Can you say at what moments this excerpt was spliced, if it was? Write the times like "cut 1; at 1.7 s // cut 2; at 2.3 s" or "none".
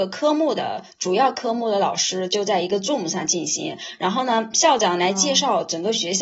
none